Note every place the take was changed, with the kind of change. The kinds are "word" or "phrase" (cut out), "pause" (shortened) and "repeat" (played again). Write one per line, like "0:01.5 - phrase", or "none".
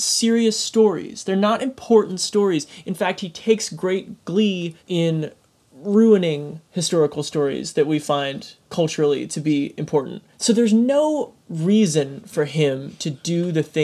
0:04.8 - pause
0:08.6 - pause
0:10.3 - pause
0:11.4 - pause